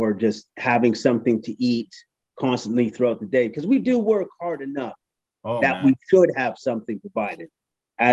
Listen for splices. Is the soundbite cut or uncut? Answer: uncut